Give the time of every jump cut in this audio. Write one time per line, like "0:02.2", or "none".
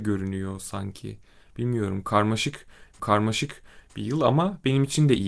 0:03.0